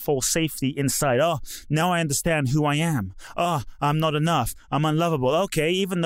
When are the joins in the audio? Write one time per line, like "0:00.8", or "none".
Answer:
none